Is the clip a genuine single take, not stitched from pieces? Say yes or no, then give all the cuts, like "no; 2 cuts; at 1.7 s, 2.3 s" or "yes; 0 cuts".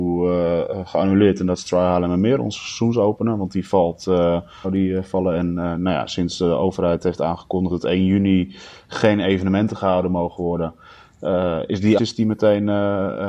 no; 3 cuts; at 4.6 s, 7.7 s, 12.0 s